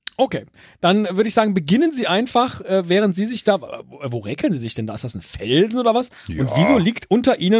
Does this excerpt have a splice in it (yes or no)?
no